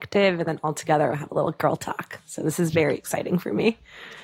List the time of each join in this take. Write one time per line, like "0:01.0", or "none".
none